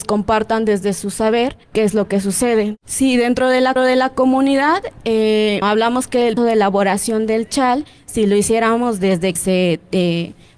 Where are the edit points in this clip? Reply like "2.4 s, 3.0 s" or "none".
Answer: 1.6 s, 3.8 s, 5.6 s, 6.4 s, 9.4 s